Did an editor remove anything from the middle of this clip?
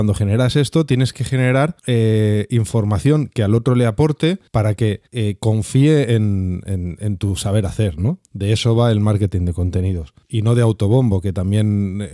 yes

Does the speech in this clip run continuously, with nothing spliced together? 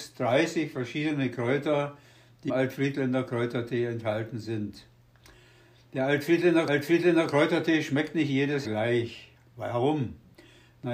no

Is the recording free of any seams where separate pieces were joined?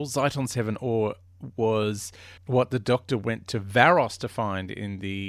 no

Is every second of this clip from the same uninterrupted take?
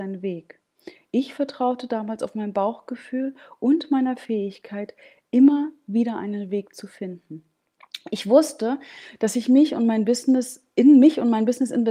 yes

